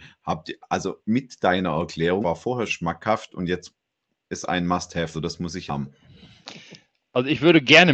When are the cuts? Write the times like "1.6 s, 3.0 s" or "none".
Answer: 2.2 s, 2.7 s, 4.4 s, 5.1 s, 5.7 s